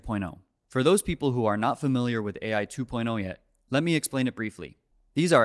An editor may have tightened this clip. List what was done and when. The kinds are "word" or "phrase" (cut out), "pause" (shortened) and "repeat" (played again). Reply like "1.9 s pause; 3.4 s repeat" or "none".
none